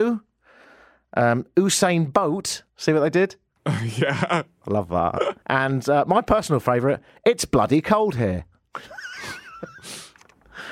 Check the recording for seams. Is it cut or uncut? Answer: cut